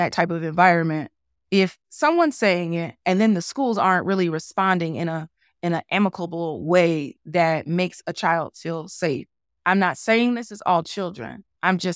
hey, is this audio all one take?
yes; 0 cuts

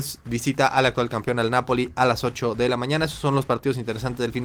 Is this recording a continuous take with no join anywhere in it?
yes; 0 cuts

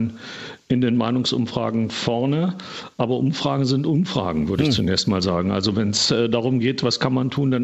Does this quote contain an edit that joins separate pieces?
no; 0 cuts

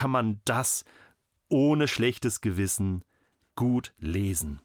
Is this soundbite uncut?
yes; 0 cuts

